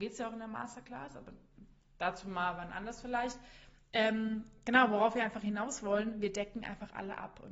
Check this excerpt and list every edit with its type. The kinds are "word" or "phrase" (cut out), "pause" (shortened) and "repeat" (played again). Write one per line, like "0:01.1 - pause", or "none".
none